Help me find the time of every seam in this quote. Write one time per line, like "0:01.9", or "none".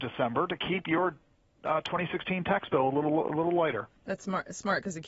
none